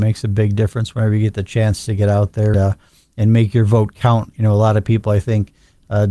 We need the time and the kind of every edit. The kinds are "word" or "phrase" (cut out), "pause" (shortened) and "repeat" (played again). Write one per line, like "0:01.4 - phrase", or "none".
0:02.5 - word